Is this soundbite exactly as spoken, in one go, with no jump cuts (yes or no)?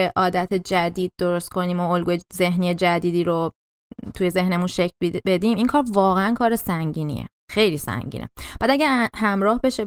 yes